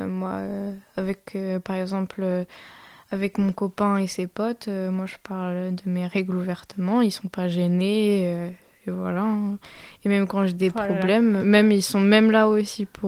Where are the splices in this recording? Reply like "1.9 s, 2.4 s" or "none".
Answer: 11.4 s